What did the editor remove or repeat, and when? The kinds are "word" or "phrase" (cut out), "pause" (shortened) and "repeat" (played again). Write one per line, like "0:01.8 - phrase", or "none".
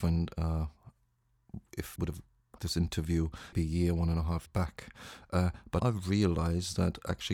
0:02.0 - word
0:02.6 - word
0:03.5 - word
0:04.5 - word
0:05.8 - word